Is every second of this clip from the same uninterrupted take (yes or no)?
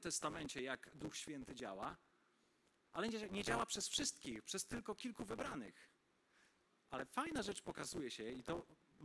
yes